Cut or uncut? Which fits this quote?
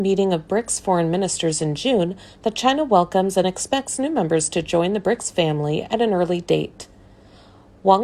uncut